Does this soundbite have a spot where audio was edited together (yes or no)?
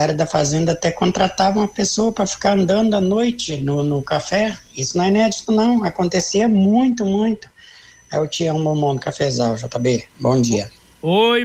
no